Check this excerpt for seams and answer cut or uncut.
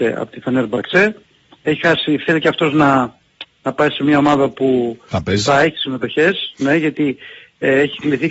uncut